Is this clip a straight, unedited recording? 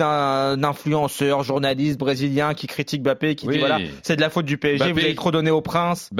yes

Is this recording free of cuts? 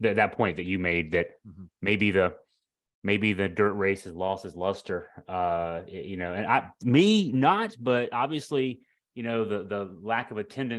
yes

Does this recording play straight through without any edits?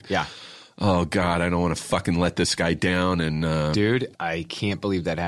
no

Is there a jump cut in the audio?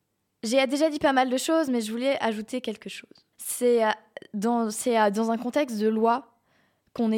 yes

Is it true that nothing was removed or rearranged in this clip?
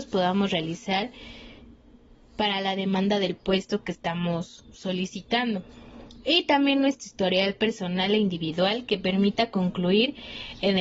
yes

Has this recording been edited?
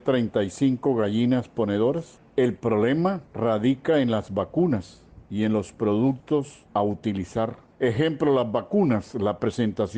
yes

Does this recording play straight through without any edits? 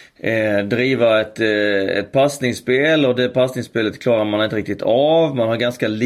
yes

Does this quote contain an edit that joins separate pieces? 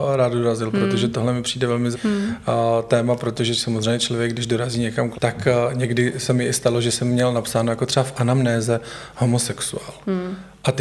yes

